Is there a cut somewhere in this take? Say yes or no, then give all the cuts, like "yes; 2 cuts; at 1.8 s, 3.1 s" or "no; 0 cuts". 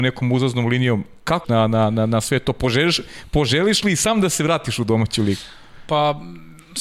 yes; 1 cut; at 1.4 s